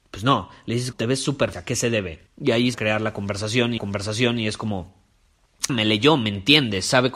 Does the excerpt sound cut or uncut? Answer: cut